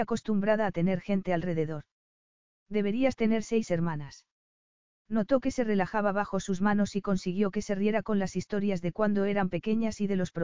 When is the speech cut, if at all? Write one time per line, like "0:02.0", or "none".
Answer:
none

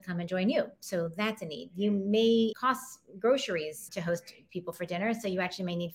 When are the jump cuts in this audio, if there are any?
0:02.5
0:03.9
0:04.5

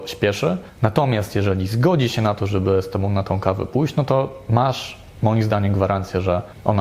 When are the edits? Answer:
none

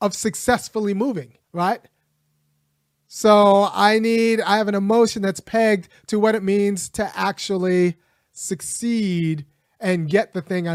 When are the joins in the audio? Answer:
0:01.4

